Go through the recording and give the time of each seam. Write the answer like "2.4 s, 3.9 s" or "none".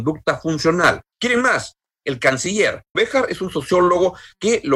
1.1 s, 2.9 s